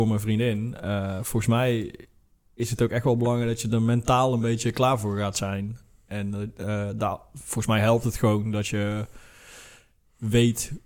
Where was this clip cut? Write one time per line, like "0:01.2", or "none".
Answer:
none